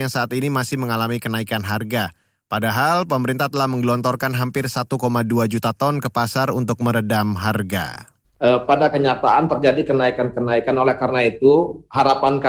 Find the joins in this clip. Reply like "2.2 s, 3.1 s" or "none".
none